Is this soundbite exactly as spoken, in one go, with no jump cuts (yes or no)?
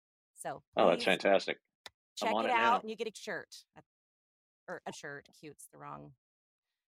no